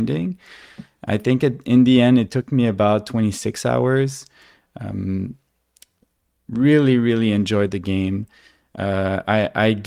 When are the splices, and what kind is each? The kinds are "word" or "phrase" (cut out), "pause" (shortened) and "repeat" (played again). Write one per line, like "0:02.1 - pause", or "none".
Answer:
none